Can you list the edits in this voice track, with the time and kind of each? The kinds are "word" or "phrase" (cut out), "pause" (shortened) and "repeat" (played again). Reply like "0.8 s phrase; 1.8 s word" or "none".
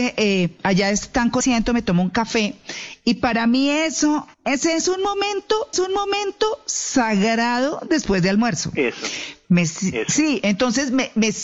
1.4 s phrase; 4.3 s pause; 5.7 s repeat